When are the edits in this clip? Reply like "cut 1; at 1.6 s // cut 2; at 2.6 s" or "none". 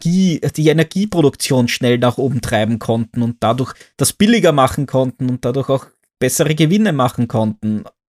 none